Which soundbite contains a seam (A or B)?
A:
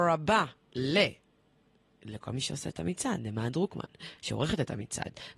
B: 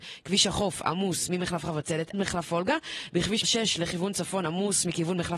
B